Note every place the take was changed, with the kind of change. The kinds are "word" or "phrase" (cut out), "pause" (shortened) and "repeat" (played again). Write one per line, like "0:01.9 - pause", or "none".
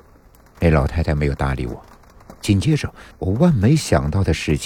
0:02.4 - pause
0:03.1 - pause